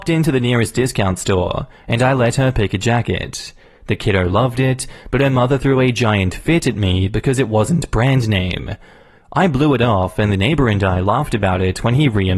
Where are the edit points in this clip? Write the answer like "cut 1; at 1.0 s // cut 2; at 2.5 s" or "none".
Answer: none